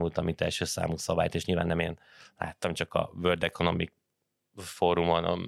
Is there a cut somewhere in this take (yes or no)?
no